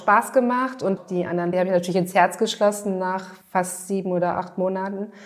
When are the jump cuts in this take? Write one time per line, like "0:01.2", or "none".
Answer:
0:01.0
0:01.5
0:03.4